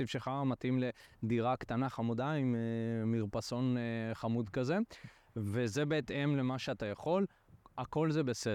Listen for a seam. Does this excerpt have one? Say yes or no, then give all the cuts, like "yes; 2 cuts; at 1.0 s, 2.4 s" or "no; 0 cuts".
no; 0 cuts